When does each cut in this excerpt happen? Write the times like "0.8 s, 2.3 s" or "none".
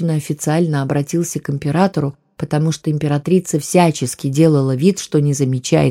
none